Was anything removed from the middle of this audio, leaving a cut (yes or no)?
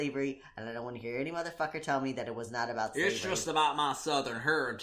no